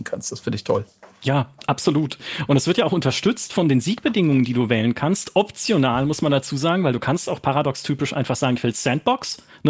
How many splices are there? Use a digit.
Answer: 0